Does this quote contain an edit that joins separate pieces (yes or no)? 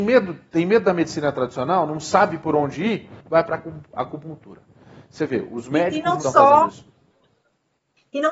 yes